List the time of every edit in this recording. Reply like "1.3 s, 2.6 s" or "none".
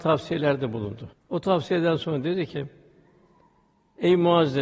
1.1 s